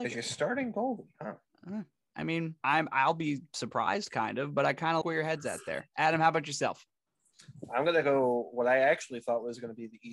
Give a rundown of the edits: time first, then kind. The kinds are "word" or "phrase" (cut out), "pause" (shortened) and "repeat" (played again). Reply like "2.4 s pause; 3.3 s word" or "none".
2.6 s pause; 5.0 s word